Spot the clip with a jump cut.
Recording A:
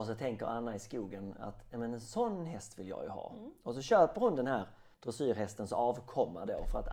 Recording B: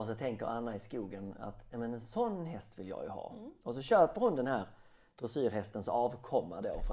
A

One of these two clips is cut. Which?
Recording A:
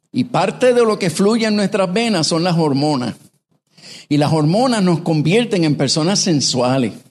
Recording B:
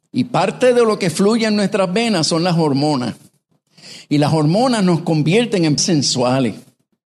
B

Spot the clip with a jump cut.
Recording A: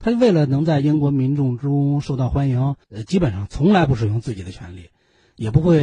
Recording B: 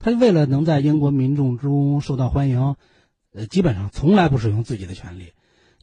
A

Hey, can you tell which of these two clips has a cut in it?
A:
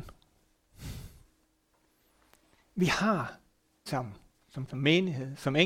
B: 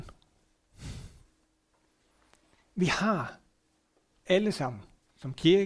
A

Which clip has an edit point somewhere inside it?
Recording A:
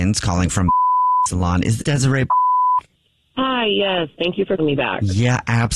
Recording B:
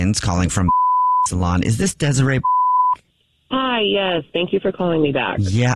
A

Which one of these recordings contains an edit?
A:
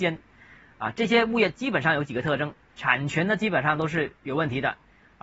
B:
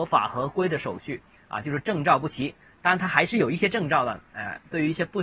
A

